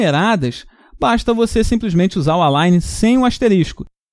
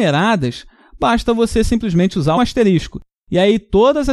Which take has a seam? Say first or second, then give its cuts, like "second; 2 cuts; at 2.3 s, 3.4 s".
second; 1 cut; at 2.4 s